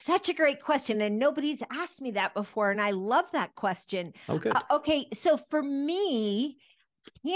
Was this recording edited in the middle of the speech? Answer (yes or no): no